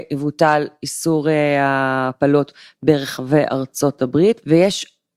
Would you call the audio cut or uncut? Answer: uncut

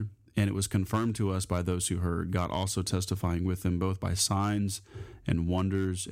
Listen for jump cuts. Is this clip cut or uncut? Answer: uncut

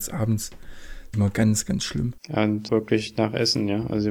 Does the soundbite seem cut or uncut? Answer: cut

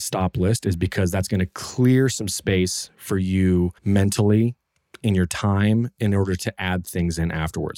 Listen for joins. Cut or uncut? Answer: cut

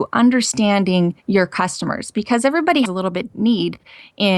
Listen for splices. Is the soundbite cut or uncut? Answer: cut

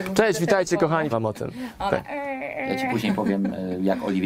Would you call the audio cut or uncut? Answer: cut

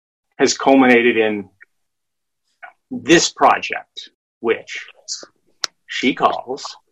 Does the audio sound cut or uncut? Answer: cut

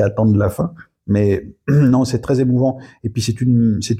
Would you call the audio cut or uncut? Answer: uncut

